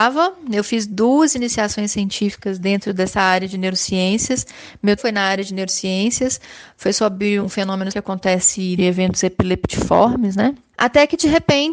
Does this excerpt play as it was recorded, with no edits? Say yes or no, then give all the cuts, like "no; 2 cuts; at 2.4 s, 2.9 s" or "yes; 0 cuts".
no; 4 cuts; at 5.0 s, 7.4 s, 7.9 s, 8.8 s